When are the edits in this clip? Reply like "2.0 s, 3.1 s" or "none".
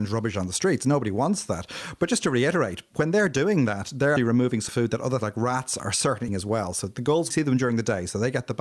4.2 s, 4.7 s, 5.2 s, 6.3 s, 7.3 s